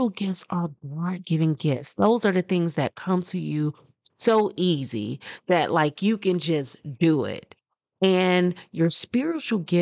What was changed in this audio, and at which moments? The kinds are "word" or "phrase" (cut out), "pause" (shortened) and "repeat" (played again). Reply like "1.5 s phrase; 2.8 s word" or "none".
none